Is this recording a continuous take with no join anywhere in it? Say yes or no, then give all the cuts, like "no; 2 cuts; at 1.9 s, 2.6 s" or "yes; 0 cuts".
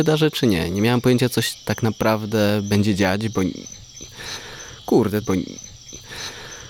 no; 1 cut; at 5.2 s